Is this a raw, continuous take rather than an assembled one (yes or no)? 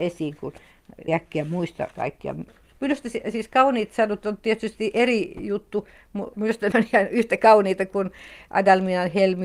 no